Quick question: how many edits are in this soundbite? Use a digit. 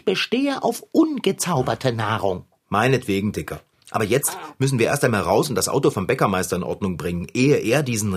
1